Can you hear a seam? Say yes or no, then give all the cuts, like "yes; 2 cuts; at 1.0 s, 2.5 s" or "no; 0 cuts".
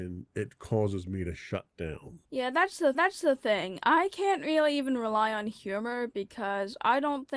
yes; 2 cuts; at 2.2 s, 2.9 s